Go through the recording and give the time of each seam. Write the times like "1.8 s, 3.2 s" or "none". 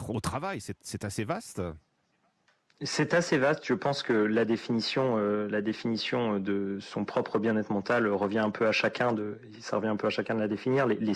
none